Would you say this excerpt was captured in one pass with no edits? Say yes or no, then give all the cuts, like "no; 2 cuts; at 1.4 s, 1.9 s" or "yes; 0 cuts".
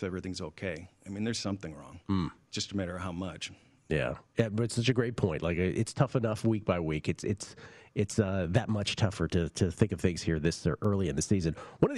no; 1 cut; at 4.3 s